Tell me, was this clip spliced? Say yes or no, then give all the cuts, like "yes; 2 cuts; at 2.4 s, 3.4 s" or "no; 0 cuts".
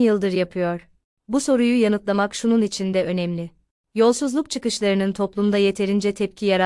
no; 0 cuts